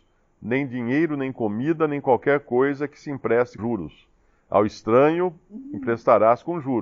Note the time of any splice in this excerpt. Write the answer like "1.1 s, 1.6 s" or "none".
3.6 s